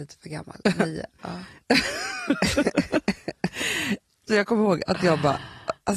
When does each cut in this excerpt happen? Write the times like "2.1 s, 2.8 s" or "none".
4.3 s